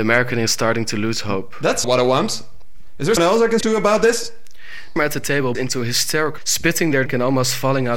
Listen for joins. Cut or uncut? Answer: cut